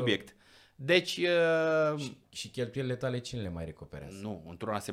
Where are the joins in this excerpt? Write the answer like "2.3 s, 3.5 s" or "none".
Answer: none